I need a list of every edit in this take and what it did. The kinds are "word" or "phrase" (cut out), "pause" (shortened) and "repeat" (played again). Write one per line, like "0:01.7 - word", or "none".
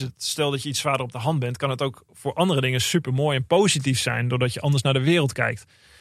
none